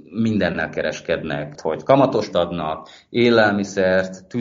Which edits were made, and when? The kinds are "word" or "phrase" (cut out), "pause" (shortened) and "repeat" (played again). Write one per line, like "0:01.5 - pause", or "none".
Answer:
0:01.6 - word
0:02.3 - word